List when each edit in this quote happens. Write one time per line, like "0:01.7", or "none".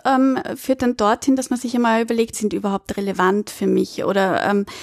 0:02.3